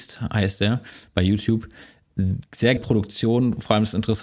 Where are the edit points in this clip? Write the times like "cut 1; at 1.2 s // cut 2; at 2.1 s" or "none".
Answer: cut 1; at 2.8 s